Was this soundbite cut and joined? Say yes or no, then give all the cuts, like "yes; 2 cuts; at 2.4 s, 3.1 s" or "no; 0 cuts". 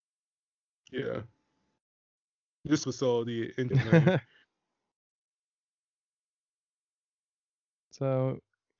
yes; 2 cuts; at 2.8 s, 3.7 s